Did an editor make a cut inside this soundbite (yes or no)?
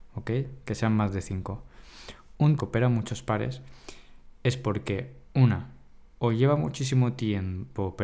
yes